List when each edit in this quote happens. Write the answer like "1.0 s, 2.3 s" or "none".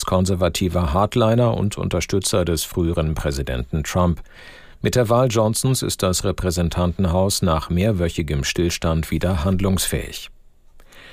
none